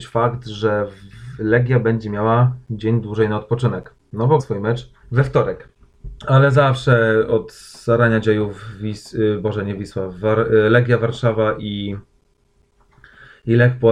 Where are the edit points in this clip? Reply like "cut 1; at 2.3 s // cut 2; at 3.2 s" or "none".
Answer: cut 1; at 4.4 s // cut 2; at 5.0 s // cut 3; at 6.2 s